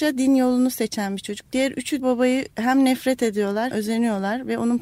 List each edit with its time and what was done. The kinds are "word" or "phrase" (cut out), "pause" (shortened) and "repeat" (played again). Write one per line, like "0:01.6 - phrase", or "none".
0:02.0 - word
0:02.5 - pause
0:03.7 - word